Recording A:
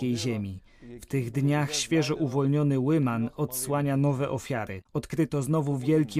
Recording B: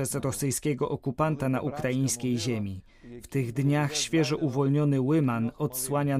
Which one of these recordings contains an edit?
A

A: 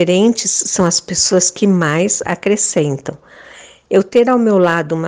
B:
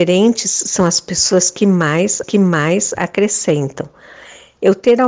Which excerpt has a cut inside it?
B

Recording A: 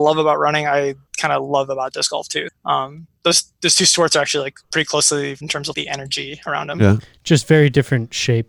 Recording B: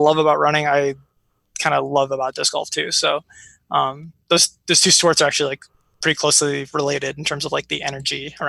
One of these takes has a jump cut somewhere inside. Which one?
A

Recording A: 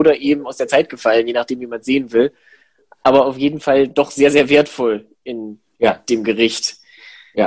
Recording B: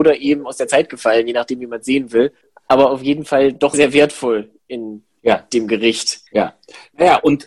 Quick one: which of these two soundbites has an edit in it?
B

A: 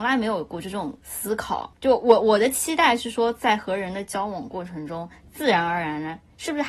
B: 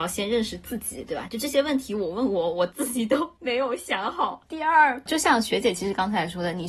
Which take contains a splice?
B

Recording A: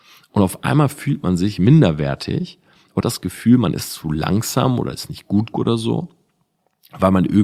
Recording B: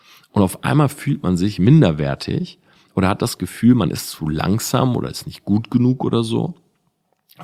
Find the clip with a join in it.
A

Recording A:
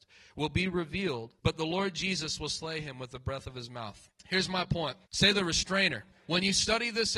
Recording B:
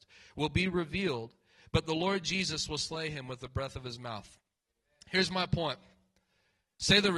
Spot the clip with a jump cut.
A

